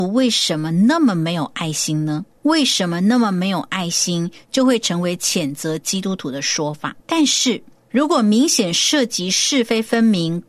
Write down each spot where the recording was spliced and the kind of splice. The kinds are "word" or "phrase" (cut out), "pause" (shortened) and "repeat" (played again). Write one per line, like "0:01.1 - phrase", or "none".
0:02.4 - pause
0:07.0 - pause